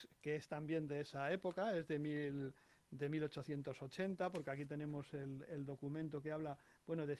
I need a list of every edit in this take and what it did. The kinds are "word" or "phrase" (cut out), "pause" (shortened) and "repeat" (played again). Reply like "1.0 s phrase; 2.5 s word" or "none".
none